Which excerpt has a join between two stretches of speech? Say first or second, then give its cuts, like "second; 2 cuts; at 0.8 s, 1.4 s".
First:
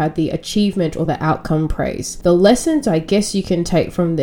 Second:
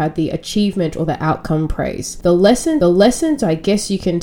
second; 1 cut; at 2.8 s